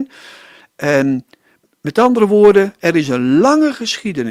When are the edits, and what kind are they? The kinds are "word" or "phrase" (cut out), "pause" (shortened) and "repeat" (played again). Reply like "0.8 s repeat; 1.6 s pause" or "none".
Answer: none